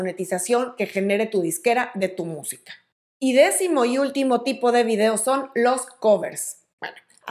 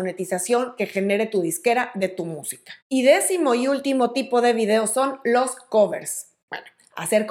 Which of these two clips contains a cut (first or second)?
second